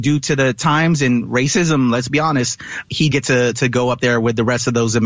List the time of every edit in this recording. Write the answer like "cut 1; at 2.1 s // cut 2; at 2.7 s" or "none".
cut 1; at 3.1 s